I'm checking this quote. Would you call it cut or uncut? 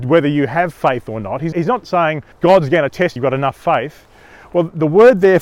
cut